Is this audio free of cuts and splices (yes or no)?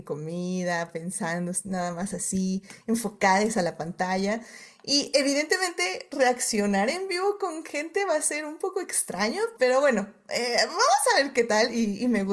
no